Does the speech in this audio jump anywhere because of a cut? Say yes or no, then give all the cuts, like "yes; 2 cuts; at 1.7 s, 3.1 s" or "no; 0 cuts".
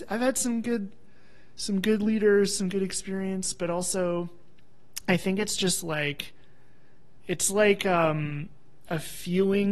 no; 0 cuts